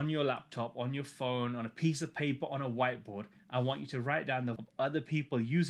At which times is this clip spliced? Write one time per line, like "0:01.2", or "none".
0:04.6